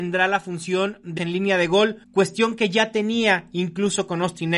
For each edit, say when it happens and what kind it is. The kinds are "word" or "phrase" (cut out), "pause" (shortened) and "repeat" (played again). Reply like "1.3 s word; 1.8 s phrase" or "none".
1.2 s word; 2.0 s pause

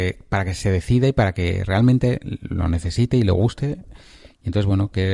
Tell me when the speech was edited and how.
none

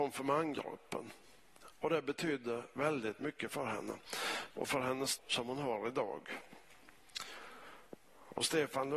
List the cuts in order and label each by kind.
5.2 s word

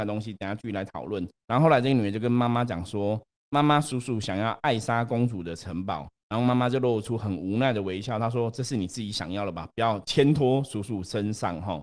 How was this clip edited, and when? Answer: 1.4 s pause; 3.3 s pause; 6.2 s pause

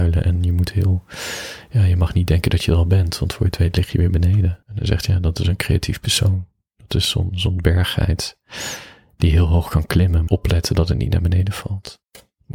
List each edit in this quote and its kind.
4.6 s pause; 10.3 s phrase

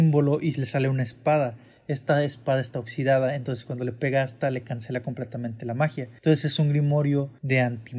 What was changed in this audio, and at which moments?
none

